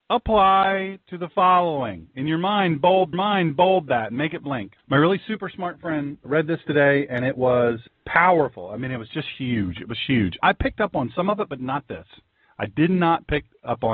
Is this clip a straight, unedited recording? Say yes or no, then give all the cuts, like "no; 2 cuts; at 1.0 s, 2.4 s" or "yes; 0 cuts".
no; 4 cuts; at 3.1 s, 4.8 s, 6.2 s, 7.9 s